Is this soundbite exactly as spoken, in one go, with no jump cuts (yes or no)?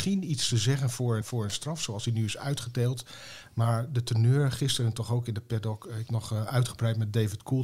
no